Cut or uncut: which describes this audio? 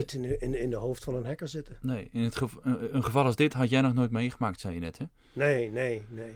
uncut